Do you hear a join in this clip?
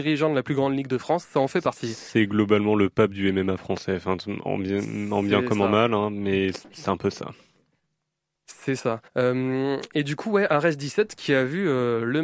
yes; 1 cut; at 9.1 s

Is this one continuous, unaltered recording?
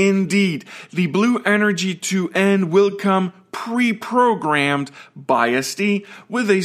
yes; 0 cuts

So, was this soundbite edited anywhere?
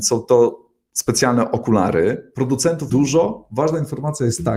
yes; 1 cut; at 2.9 s

